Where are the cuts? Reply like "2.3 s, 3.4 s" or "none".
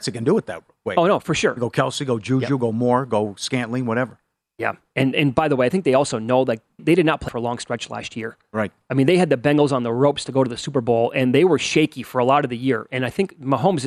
6.8 s, 7.3 s